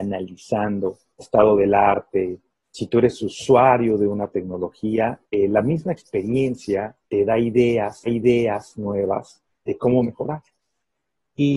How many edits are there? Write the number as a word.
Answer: four